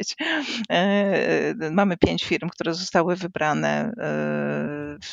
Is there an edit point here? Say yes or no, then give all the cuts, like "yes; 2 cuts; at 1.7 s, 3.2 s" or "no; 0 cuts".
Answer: no; 0 cuts